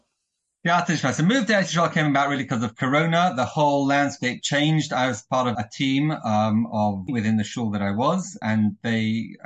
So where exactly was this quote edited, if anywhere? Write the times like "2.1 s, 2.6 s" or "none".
5.5 s, 7.1 s